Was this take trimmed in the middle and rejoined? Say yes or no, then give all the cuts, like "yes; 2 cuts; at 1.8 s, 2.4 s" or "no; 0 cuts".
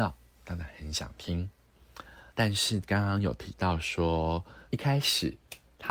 yes; 2 cuts; at 2.3 s, 4.6 s